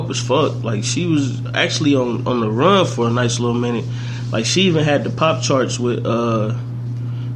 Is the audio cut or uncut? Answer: uncut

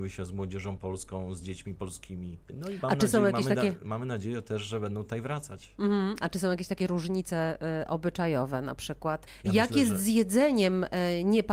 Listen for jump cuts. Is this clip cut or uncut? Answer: uncut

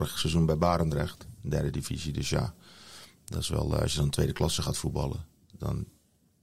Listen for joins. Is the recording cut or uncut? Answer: uncut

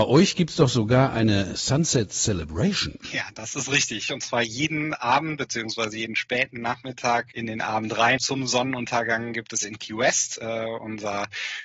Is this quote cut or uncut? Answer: cut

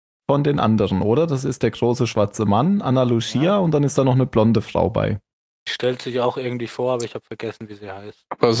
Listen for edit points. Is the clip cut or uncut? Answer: uncut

